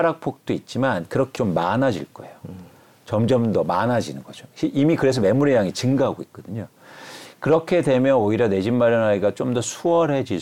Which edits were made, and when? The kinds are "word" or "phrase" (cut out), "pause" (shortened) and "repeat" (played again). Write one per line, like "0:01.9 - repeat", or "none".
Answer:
0:01.3 - phrase